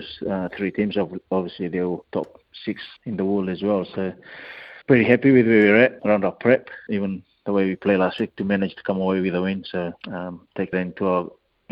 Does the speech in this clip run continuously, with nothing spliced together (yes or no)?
no